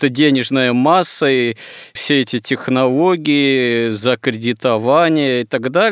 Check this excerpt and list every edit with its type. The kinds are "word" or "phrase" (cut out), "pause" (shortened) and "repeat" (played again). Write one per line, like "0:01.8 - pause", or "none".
none

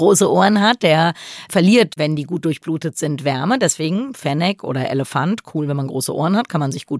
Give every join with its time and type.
none

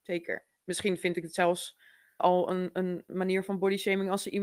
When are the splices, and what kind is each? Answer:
0:02.2 - word

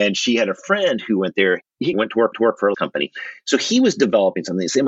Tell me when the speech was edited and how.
0:01.9 - word
0:02.3 - repeat
0:02.7 - word

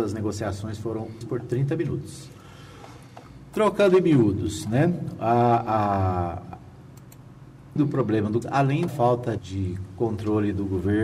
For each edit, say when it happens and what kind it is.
0:01.2 - word
0:07.8 - word
0:08.4 - word
0:08.9 - word
0:09.4 - word

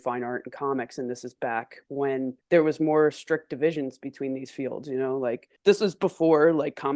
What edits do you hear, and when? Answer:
0:02.4 - pause
0:05.6 - pause

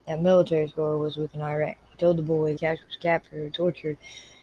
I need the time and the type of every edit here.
0:01.3 - word
0:02.6 - word
0:03.5 - word

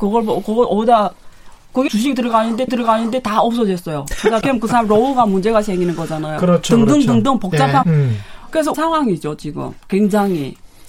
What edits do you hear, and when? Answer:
0:01.9 - word
0:02.7 - repeat
0:04.4 - word
0:07.8 - word
0:08.7 - word

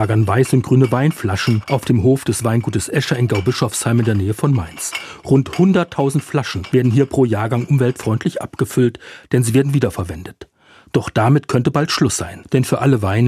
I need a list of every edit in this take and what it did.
none

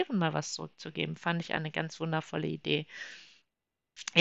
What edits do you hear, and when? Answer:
none

